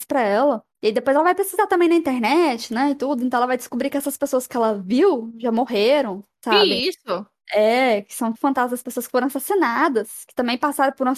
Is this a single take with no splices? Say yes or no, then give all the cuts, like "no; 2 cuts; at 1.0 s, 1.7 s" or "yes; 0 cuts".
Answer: no; 1 cut; at 8.3 s